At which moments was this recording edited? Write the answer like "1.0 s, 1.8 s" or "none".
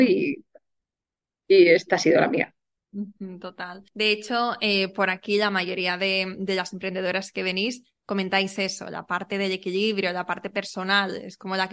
3.9 s